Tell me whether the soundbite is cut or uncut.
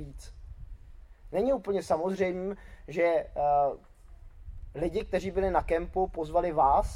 uncut